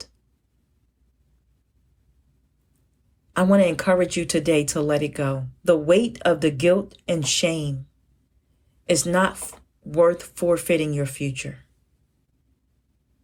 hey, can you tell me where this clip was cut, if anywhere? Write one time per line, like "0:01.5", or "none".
0:05.6
0:08.3